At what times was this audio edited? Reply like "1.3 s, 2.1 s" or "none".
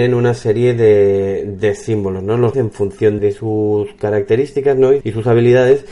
2.5 s, 3.2 s, 5.0 s